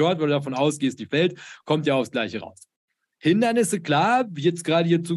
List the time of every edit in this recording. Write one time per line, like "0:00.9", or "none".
none